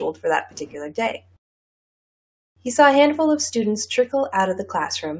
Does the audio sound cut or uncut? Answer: uncut